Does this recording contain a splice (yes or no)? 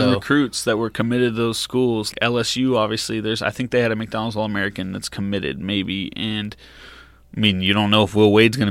yes